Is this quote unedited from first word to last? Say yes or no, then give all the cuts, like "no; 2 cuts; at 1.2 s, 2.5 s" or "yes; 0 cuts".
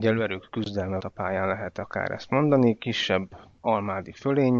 no; 1 cut; at 1.0 s